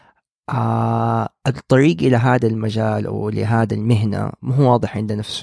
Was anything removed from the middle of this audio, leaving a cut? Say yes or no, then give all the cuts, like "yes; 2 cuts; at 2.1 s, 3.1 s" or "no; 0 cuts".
no; 0 cuts